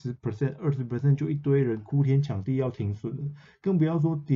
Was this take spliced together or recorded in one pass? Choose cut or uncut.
uncut